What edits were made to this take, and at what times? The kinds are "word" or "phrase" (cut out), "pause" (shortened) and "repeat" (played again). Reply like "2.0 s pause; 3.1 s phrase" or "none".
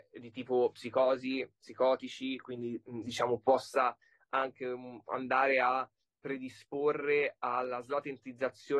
none

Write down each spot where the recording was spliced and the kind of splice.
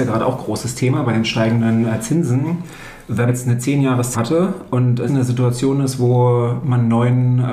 3.3 s word; 4.1 s word; 5.1 s word

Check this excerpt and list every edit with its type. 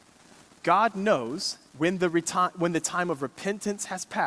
1.7 s pause

